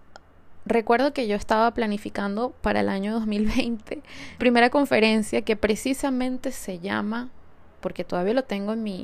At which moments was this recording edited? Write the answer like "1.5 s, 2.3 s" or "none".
4.4 s